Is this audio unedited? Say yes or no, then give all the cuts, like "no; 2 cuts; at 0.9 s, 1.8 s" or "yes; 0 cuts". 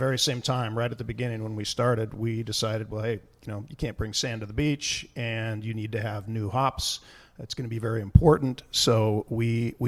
yes; 0 cuts